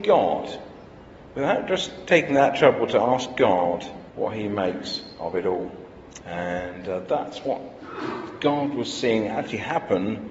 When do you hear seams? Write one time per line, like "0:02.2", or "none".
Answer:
0:04.1
0:06.2